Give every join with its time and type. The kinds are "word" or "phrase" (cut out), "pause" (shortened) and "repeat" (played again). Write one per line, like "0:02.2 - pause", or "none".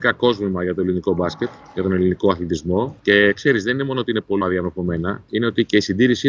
0:03.0 - pause
0:04.4 - word